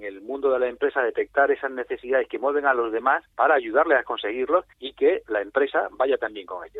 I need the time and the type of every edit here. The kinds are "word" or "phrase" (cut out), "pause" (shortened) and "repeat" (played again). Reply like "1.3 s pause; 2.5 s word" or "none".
3.3 s pause; 4.7 s pause; 5.3 s phrase